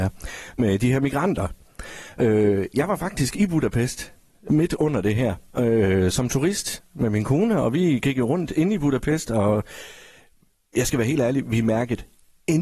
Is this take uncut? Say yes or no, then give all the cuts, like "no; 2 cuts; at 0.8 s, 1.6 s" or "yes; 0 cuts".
yes; 0 cuts